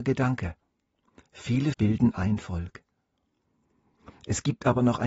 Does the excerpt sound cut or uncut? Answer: cut